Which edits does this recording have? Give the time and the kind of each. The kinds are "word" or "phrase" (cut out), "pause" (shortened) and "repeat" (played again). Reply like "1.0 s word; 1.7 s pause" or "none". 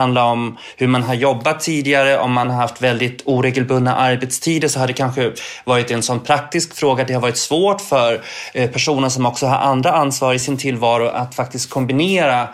none

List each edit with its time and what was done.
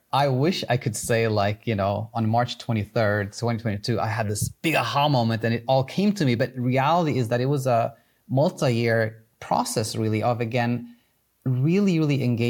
none

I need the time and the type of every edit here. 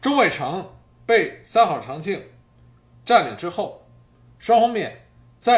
none

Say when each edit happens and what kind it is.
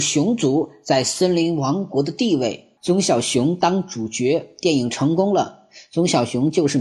2.8 s word

